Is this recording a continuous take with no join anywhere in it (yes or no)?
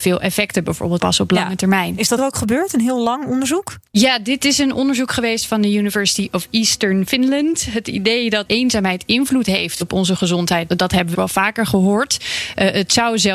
no